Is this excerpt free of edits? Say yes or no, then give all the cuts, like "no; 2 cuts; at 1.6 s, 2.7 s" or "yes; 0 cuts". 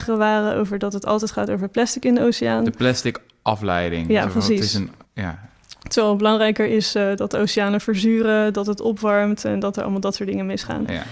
yes; 0 cuts